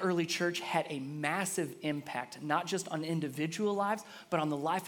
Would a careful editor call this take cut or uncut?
uncut